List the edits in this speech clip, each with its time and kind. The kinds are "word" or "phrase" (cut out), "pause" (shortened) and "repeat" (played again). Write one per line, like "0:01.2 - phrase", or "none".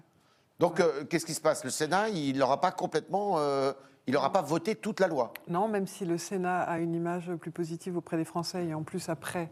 none